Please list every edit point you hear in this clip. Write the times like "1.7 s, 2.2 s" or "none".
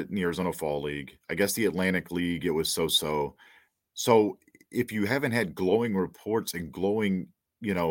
none